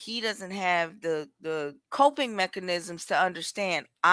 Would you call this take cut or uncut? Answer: cut